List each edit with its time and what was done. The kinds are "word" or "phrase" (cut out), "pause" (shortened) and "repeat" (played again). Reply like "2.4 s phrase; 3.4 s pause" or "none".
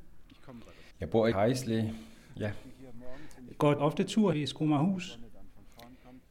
0.9 s pause; 1.3 s word; 3.8 s word; 4.3 s word